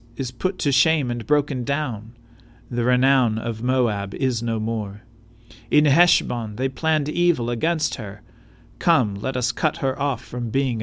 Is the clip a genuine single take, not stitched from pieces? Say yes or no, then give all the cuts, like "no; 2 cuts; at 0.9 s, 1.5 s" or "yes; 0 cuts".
yes; 0 cuts